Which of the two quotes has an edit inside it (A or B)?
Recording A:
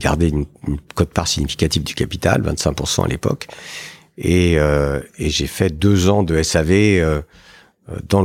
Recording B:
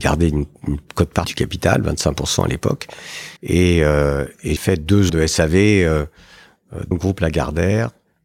B